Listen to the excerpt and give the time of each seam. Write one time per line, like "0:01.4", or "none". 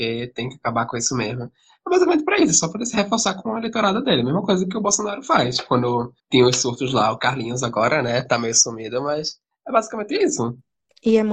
0:06.2